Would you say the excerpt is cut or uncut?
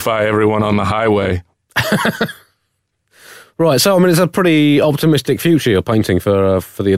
uncut